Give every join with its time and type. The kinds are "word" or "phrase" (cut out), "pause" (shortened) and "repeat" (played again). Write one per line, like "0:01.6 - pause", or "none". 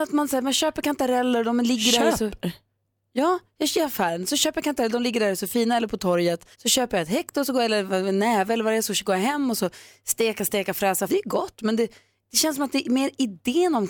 0:06.5 - pause
0:11.1 - phrase